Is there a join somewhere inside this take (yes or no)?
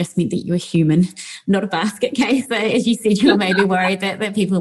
yes